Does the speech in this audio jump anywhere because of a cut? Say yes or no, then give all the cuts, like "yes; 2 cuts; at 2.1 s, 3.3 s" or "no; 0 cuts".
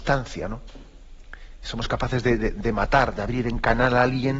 no; 0 cuts